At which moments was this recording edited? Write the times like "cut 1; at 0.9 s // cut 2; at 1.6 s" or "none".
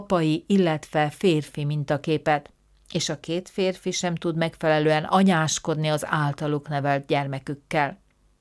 none

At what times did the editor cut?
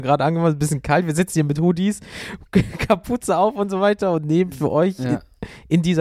none

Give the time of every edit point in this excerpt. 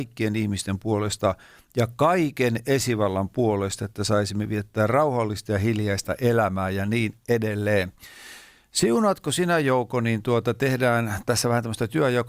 none

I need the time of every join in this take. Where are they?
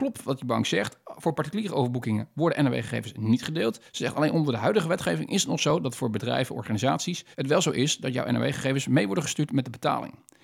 cut 1; at 3.9 s // cut 2; at 7.3 s

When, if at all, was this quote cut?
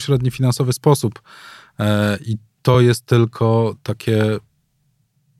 none

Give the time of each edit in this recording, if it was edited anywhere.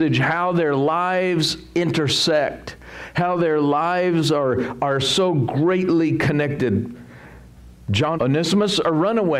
cut 1; at 8.2 s

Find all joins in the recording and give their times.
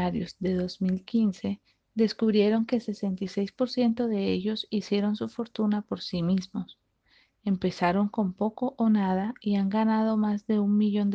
none

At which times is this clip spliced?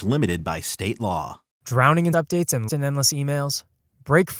cut 1; at 2.1 s // cut 2; at 2.7 s

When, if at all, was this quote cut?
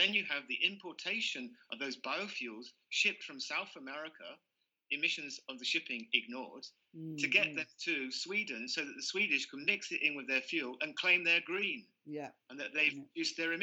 none

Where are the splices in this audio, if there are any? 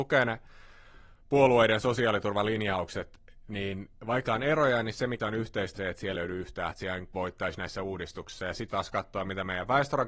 cut 1; at 4.3 s // cut 2; at 5.2 s // cut 3; at 5.8 s // cut 4; at 6.1 s // cut 5; at 6.7 s // cut 6; at 7.1 s // cut 7; at 8.7 s

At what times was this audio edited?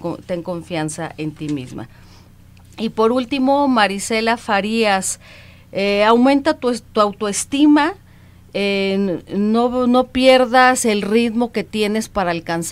none

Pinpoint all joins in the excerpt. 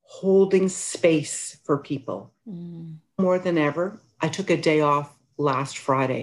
cut 1; at 2.4 s

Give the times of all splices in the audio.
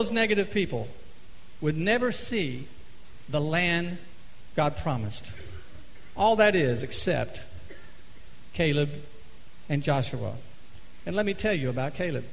none

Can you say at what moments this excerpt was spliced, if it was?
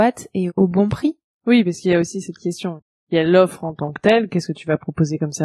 none

